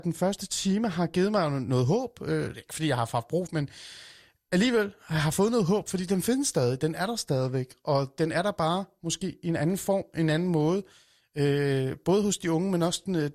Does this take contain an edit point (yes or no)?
yes